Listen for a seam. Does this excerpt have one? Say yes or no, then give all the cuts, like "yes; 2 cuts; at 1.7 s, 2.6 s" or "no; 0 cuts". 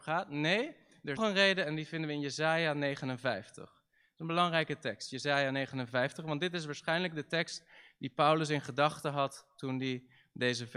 yes; 1 cut; at 1.2 s